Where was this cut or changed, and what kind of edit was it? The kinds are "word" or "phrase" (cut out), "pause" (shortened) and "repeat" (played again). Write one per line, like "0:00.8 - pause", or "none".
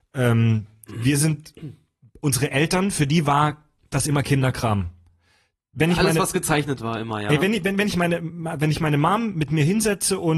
none

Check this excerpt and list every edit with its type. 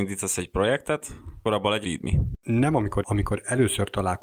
0:01.4 - word
0:01.8 - word
0:03.0 - word

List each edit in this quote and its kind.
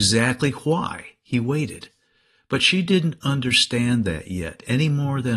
none

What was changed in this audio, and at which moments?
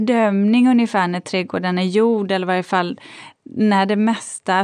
none

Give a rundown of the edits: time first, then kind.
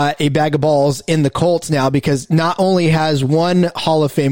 none

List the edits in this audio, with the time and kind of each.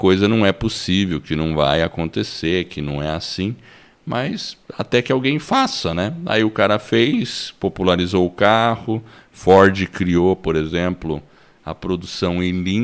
none

